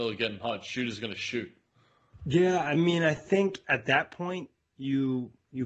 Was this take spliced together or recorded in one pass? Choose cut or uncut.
uncut